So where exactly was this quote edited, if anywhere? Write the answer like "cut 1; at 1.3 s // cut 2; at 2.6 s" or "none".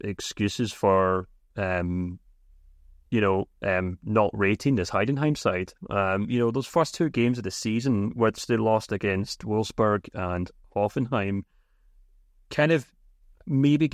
none